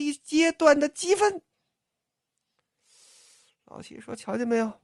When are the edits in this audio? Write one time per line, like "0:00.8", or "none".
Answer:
none